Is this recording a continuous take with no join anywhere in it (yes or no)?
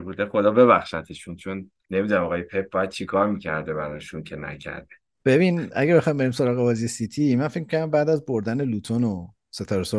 yes